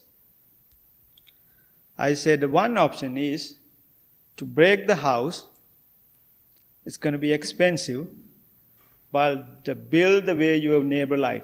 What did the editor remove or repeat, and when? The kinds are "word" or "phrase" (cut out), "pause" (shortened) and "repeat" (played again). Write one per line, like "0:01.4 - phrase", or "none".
none